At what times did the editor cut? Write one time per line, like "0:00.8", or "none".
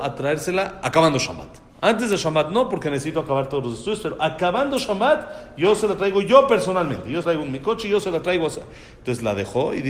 0:01.7
0:07.2